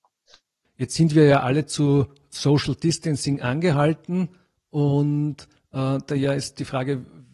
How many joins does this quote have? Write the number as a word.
zero